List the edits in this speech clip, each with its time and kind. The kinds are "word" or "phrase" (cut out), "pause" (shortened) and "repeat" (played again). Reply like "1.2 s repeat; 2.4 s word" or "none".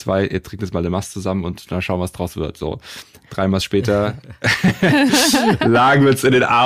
none

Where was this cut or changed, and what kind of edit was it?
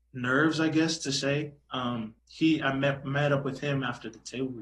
2.2 s pause

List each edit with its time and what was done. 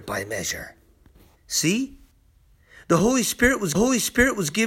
3.7 s repeat

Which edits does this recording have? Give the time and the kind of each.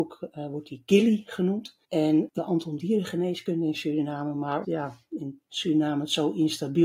1.8 s pause; 2.4 s phrase; 2.8 s phrase; 4.6 s word

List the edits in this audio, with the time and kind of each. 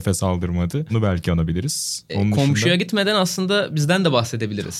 none

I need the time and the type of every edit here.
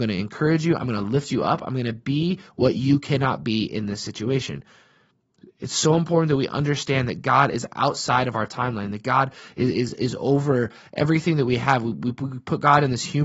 none

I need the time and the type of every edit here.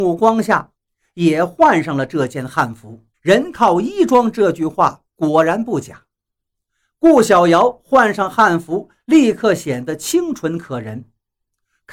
3.1 s pause

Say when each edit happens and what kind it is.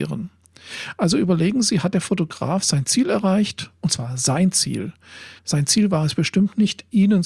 5.4 s pause

